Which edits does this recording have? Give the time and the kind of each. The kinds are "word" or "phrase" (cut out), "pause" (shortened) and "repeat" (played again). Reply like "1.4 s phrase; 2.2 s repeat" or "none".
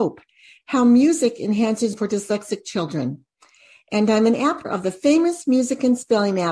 1.9 s word; 4.6 s word